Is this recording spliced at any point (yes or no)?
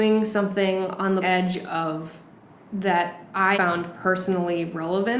yes